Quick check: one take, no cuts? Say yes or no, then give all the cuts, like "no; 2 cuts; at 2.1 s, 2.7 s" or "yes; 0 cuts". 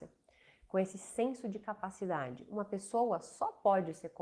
yes; 0 cuts